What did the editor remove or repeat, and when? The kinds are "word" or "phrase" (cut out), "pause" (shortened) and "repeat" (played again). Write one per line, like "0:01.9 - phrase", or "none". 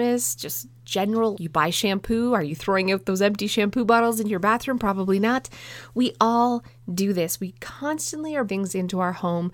0:01.3 - word
0:08.5 - word